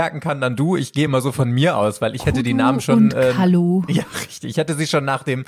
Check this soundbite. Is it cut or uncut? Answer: uncut